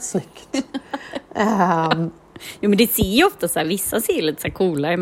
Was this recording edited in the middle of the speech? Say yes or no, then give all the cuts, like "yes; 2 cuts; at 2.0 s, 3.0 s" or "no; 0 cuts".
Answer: no; 0 cuts